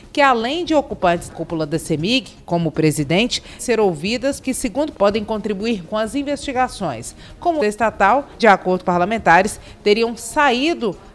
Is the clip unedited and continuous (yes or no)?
no